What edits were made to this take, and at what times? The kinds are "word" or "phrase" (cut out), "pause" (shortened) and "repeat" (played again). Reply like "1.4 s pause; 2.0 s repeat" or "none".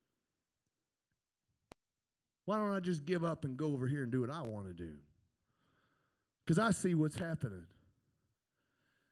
none